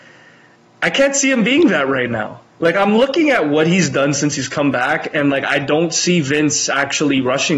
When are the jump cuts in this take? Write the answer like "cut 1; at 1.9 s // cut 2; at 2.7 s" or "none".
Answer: cut 1; at 2.5 s